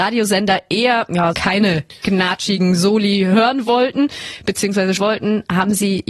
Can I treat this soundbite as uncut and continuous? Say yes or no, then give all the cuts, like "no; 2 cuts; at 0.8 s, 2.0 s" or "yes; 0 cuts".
no; 2 cuts; at 1.3 s, 5.0 s